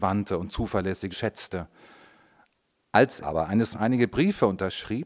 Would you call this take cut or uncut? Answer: cut